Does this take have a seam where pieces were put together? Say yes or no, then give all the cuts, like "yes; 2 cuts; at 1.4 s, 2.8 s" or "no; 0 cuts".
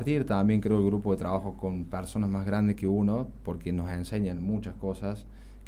no; 0 cuts